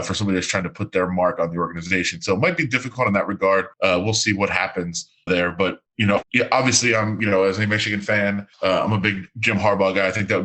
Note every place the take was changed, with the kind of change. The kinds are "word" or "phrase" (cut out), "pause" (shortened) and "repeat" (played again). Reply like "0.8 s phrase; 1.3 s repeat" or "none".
3.7 s pause; 5.3 s word; 5.9 s pause; 6.2 s word; 8.5 s pause